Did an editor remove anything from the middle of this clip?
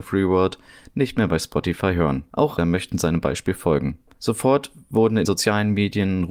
yes; 2 cuts; at 2.6 s, 5.2 s

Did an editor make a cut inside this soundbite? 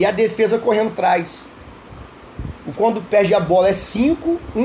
yes; 2 cuts; at 1.0 s, 2.8 s

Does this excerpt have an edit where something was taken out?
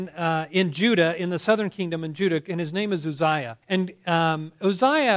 yes; 1 cut; at 3.6 s

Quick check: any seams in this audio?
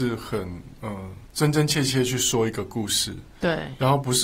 yes; 1 cut; at 1.3 s

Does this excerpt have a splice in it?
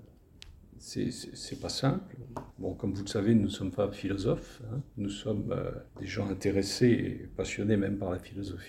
yes; 2 cuts; at 2.5 s, 5.9 s

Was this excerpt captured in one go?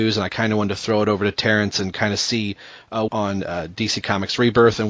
no; 1 cut; at 3.1 s

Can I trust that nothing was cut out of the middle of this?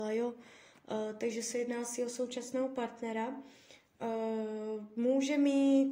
yes; 0 cuts

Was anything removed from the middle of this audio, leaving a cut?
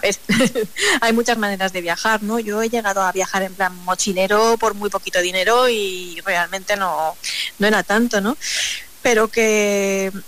no; 0 cuts

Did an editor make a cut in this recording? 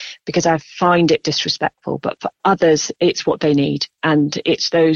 no; 0 cuts

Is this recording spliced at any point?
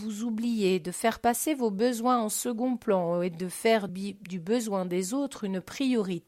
yes; 1 cut; at 3.9 s

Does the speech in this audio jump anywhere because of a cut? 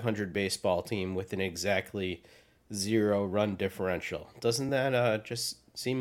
no; 0 cuts

